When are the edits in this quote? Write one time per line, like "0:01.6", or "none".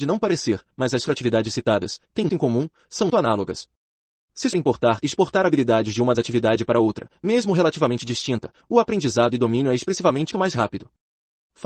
0:01.1
0:02.3
0:03.1
0:04.5
0:06.1
0:10.3